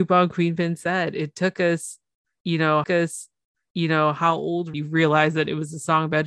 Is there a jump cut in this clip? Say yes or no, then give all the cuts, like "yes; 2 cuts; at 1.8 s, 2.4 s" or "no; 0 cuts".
yes; 2 cuts; at 2.8 s, 4.7 s